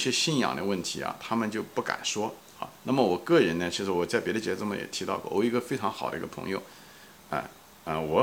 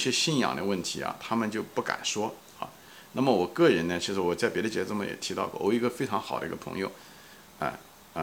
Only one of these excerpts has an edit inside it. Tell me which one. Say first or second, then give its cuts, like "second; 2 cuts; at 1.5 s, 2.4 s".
first; 1 cut; at 2.8 s